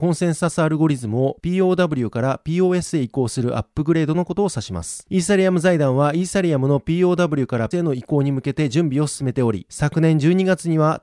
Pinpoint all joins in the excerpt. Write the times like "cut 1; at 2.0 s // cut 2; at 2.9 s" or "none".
cut 1; at 7.7 s